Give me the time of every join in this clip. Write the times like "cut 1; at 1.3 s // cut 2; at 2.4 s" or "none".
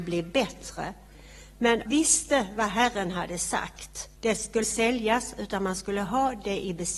cut 1; at 1.9 s // cut 2; at 4.2 s // cut 3; at 4.6 s